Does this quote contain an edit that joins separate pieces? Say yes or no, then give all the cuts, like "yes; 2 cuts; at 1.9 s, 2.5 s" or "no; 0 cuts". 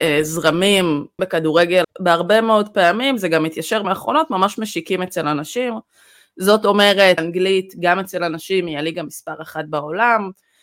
yes; 4 cuts; at 1.2 s, 1.8 s, 3.8 s, 7.2 s